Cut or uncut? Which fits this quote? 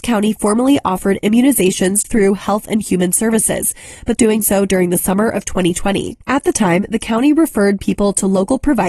cut